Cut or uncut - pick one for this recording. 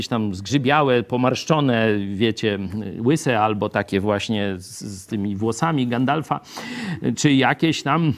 uncut